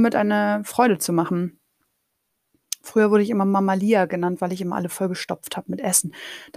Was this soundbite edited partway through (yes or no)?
no